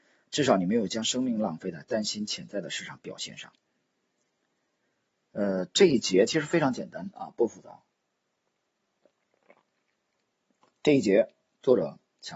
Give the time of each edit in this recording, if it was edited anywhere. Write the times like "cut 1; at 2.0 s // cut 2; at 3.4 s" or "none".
none